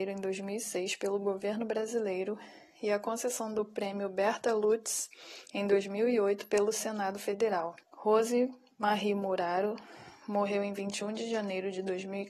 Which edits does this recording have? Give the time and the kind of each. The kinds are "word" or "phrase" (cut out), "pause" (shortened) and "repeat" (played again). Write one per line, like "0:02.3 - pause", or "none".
0:07.8 - pause